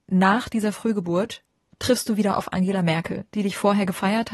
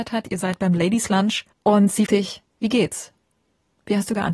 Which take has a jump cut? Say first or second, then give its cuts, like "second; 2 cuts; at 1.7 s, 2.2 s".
second; 3 cuts; at 1.5 s, 2.1 s, 2.5 s